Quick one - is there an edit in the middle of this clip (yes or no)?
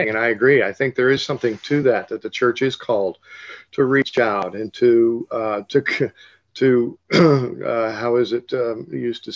no